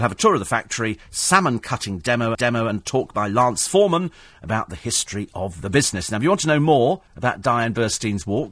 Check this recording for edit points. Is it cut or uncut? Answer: cut